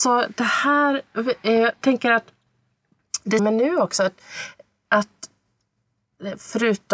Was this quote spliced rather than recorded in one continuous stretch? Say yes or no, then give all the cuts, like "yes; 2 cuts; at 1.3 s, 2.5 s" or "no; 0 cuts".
yes; 2 cuts; at 1.8 s, 3.4 s